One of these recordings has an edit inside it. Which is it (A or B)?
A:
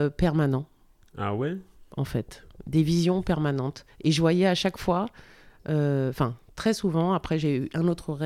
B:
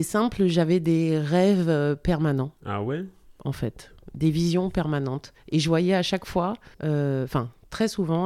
B